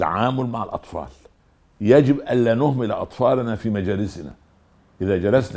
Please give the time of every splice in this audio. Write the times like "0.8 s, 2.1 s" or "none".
none